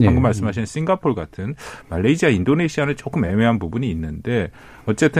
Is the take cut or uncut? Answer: uncut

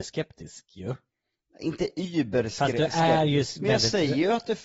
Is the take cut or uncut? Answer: uncut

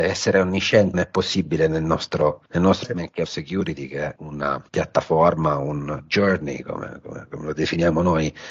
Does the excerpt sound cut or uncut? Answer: cut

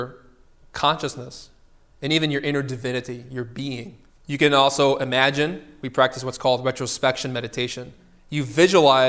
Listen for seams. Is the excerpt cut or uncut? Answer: cut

